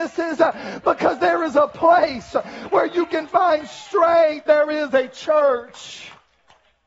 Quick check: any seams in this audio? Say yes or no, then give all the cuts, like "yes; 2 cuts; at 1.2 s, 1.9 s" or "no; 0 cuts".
no; 0 cuts